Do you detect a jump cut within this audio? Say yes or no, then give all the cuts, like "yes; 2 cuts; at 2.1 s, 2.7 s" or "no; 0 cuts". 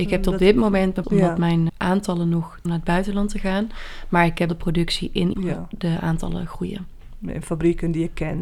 yes; 5 cuts; at 1.0 s, 1.7 s, 2.7 s, 4.5 s, 5.3 s